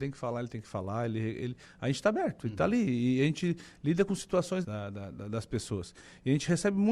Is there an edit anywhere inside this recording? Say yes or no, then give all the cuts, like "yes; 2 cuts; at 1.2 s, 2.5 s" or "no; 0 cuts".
yes; 1 cut; at 4.6 s